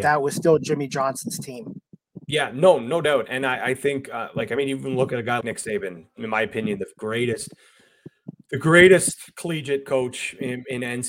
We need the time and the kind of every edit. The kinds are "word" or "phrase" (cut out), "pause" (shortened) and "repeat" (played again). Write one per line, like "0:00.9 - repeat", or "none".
0:05.4 - word